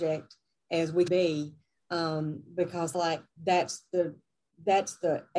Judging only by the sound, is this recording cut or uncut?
cut